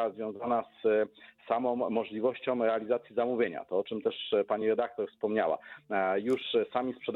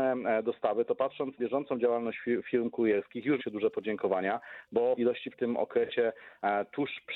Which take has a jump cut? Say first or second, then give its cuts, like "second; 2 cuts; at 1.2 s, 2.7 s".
second; 4 cuts; at 1.4 s, 3.4 s, 5.0 s, 5.3 s